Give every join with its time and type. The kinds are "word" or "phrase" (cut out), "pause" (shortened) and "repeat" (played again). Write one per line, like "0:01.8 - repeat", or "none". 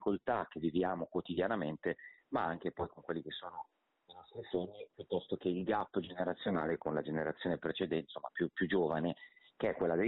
none